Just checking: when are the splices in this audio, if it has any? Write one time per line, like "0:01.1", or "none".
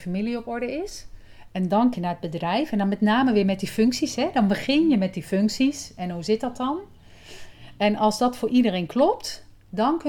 0:01.9

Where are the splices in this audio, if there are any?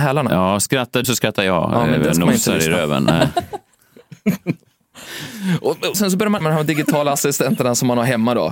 0:01.0
0:05.9
0:06.4

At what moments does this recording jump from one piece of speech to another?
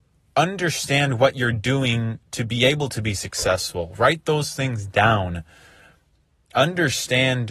none

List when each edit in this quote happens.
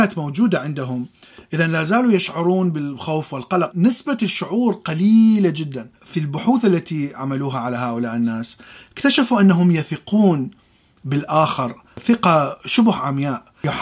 0:03.7
0:06.0

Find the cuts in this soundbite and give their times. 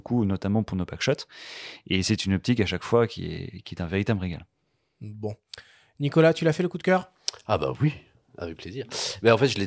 none

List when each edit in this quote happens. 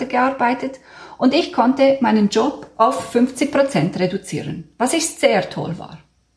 none

